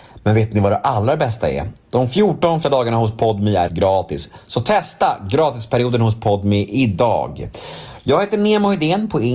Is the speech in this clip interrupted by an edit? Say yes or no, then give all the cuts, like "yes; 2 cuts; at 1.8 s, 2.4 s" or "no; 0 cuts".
yes; 2 cuts; at 2.6 s, 3.7 s